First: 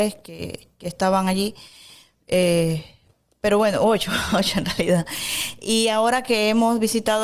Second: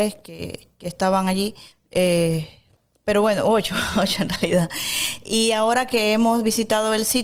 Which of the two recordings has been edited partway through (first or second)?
second